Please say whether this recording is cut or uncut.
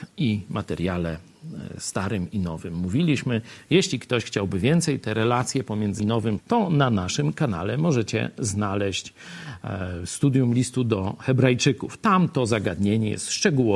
cut